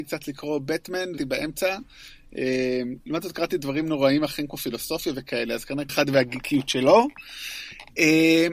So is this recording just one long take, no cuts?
no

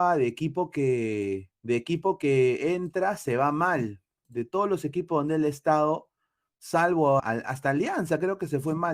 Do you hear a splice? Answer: yes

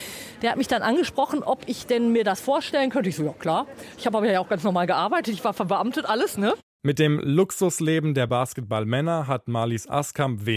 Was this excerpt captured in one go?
yes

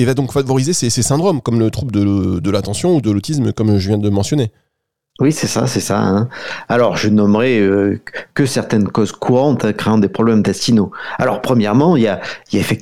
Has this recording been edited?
no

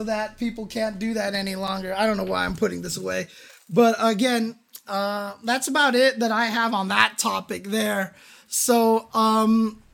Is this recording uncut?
yes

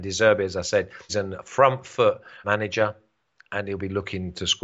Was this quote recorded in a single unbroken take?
no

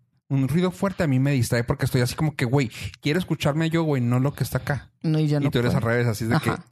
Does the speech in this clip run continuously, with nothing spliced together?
yes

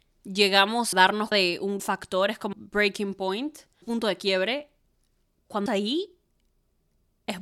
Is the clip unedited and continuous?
no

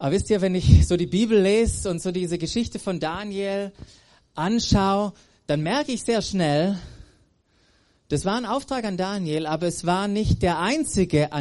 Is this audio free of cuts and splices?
yes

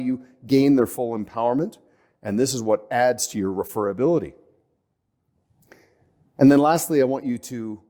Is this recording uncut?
yes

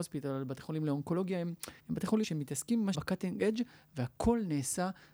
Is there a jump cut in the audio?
yes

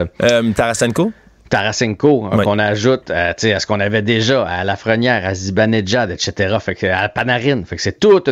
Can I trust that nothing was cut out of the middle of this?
yes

